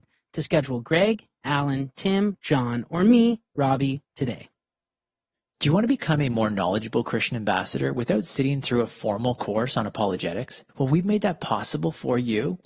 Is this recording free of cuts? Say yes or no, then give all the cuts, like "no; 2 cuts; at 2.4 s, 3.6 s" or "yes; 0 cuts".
no; 2 cuts; at 4.1 s, 10.7 s